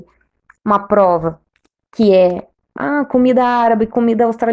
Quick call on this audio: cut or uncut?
uncut